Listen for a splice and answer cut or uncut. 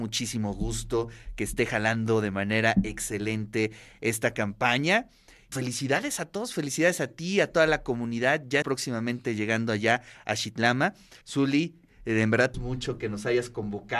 cut